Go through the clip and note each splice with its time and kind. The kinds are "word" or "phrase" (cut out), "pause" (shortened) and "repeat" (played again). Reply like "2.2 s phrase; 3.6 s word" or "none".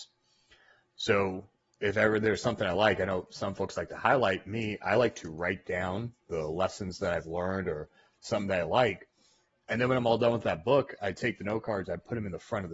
none